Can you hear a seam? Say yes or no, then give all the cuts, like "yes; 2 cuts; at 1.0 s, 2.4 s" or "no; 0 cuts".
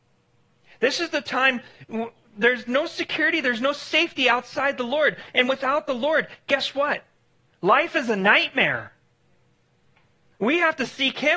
no; 0 cuts